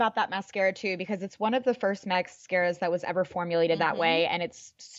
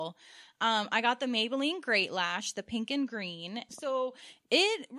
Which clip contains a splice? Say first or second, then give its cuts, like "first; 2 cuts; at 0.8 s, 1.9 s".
second; 1 cut; at 3.7 s